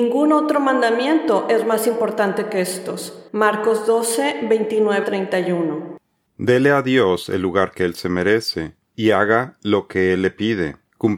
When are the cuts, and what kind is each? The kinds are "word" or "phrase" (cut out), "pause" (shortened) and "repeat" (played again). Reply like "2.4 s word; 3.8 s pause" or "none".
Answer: 3.3 s pause; 5.0 s word